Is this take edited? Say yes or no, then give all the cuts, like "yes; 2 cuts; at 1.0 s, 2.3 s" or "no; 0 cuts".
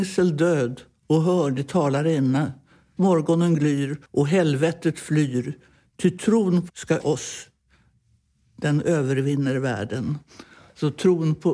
yes; 4 cuts; at 3.0 s, 4.0 s, 6.7 s, 7.0 s